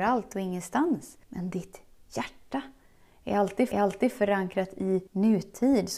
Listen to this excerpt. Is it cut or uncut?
cut